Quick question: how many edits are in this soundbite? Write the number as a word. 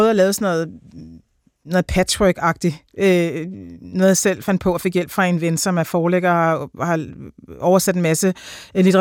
zero